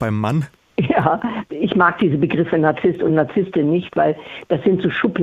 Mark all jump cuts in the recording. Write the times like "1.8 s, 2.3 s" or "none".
none